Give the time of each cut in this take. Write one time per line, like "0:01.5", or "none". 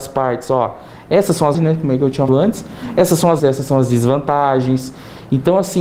0:01.5
0:02.3
0:03.4